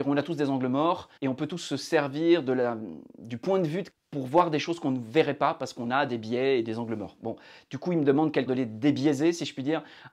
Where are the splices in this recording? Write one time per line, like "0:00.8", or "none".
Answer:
0:01.2
0:03.9
0:08.5